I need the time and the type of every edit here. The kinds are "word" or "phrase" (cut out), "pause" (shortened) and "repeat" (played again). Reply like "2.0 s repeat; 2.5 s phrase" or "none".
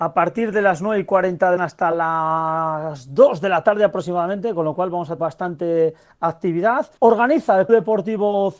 1.6 s phrase; 5.2 s word; 7.0 s pause; 7.7 s word